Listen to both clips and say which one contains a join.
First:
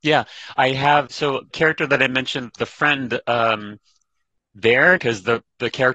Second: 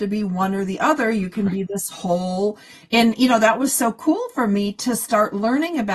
first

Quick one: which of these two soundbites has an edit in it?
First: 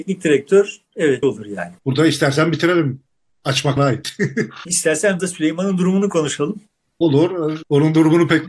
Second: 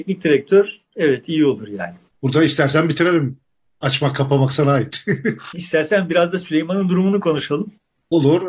first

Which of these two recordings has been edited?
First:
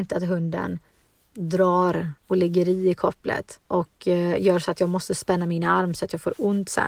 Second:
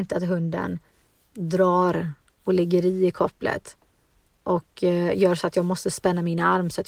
first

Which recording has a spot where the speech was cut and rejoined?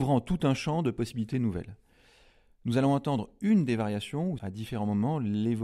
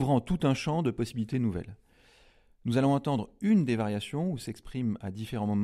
first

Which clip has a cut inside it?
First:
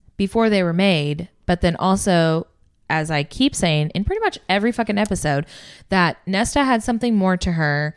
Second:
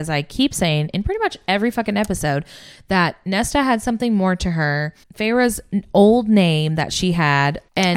second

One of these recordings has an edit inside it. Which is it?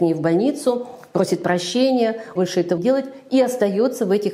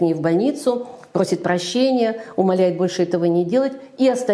first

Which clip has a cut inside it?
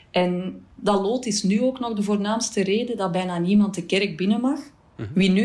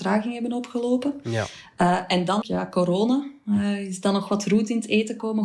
second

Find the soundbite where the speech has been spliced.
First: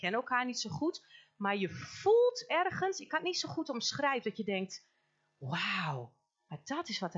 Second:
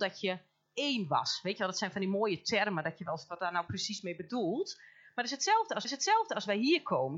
second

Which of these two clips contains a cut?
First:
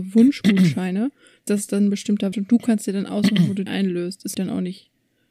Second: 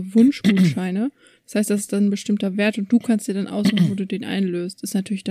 first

